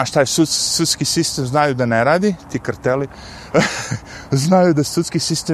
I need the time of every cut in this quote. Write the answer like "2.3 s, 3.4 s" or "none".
none